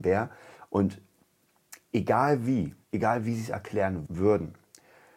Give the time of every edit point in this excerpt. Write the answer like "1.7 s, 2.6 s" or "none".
2.8 s, 4.1 s